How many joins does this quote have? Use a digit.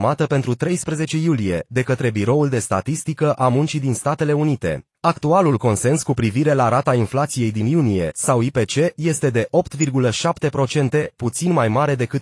1